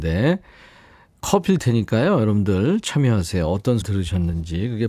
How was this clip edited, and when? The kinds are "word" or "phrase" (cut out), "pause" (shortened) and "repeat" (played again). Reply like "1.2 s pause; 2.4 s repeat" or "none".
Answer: 1.6 s word; 3.8 s word

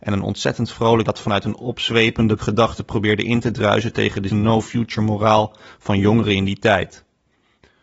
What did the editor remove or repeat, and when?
1.1 s word; 2.4 s word; 4.3 s word

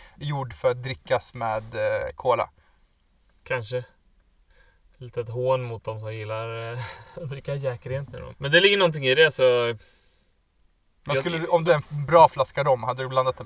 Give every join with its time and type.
8.3 s word; 11.7 s word

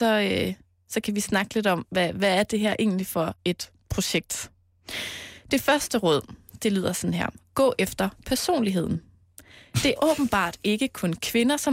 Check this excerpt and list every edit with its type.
10.0 s word

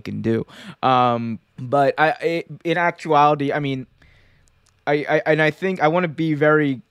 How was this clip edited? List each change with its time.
1.5 s pause

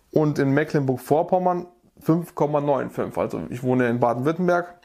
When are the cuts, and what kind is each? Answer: none

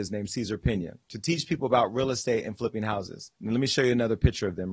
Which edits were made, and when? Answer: 3.3 s pause

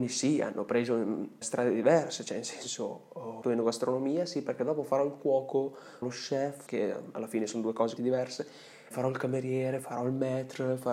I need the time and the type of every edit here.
1.4 s word; 3.4 s word; 6.0 s word; 6.7 s word; 8.0 s word; 8.9 s word

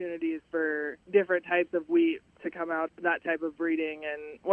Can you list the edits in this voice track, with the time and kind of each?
1.0 s pause; 2.9 s word

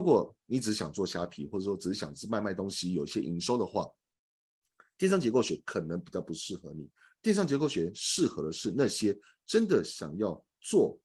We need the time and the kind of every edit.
none

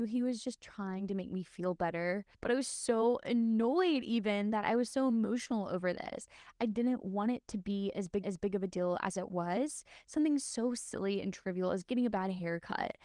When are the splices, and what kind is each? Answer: 2.3 s pause; 8.2 s repeat

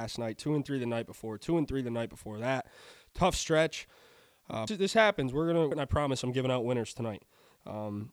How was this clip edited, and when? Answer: 4.7 s phrase; 5.7 s phrase

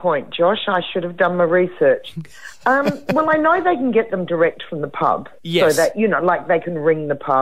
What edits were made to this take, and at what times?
none

